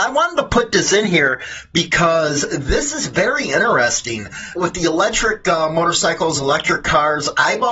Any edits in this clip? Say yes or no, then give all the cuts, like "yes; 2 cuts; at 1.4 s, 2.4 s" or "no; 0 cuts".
yes; 1 cut; at 4.6 s